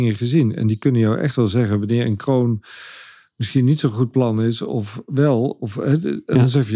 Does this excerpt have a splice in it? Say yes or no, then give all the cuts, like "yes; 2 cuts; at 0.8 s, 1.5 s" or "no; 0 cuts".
no; 0 cuts